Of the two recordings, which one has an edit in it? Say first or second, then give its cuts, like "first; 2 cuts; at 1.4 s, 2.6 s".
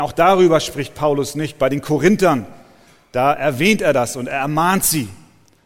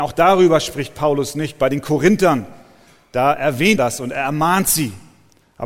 second; 1 cut; at 3.8 s